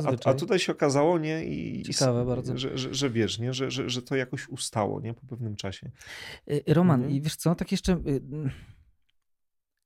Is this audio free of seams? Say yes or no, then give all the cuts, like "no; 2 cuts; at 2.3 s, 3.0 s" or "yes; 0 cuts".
yes; 0 cuts